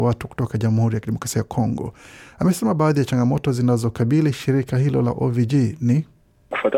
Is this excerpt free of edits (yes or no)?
yes